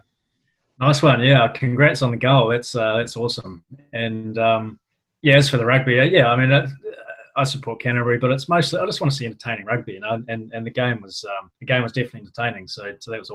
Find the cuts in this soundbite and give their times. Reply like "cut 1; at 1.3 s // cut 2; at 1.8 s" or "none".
cut 1; at 4.9 s // cut 2; at 11.5 s